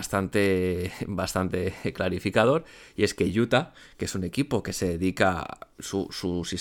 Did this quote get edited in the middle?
no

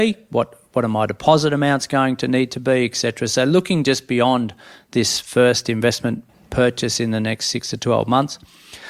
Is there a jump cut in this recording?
no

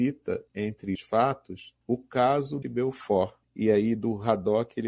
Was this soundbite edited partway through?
yes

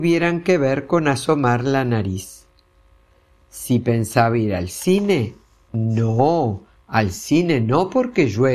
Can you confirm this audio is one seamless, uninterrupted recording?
yes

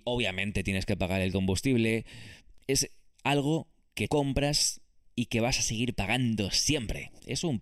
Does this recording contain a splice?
yes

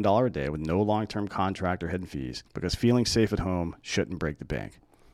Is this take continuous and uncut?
no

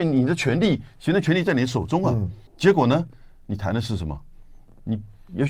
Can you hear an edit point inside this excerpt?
yes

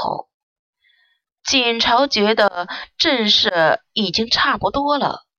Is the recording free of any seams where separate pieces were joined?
yes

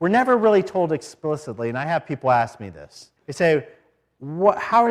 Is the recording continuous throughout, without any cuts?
no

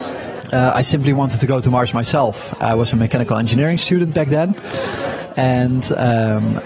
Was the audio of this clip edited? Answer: no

